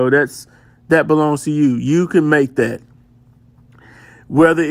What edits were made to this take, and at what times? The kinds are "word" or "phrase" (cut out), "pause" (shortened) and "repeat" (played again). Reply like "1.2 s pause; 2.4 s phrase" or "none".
none